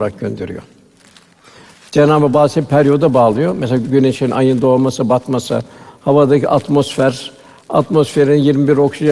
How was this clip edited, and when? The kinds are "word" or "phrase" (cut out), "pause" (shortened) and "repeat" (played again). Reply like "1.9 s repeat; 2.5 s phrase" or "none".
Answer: none

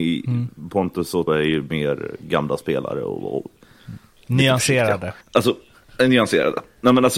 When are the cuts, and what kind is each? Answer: 1.3 s word; 5.2 s pause

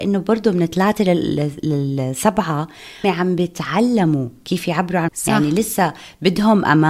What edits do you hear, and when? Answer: 3.0 s word; 5.1 s word

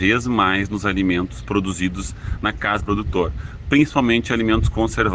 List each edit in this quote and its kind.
2.8 s word

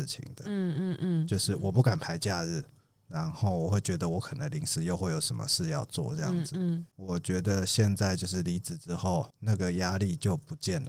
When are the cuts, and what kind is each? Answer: none

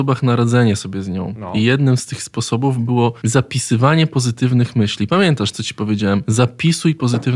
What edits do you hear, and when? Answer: none

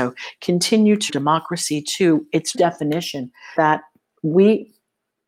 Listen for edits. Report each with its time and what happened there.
1.1 s word; 2.5 s word; 3.6 s word

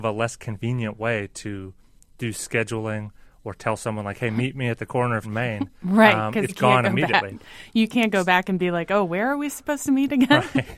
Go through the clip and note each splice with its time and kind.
5.2 s word; 6.5 s word

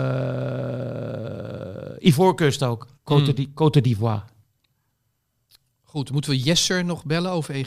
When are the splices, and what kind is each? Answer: 2.9 s pause

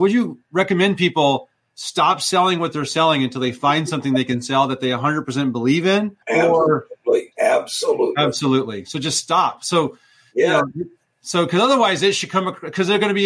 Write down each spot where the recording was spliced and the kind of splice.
6.2 s pause; 7.3 s pause

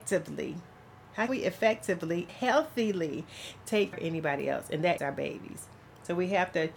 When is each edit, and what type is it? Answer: 1.3 s word; 2.3 s word; 3.9 s word; 5.0 s word

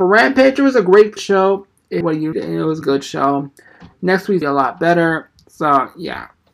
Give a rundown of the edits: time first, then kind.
1.2 s word; 2.0 s word; 2.3 s word; 2.8 s phrase; 4.4 s phrase

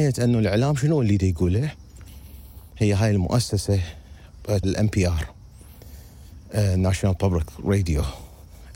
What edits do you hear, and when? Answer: 4.6 s word

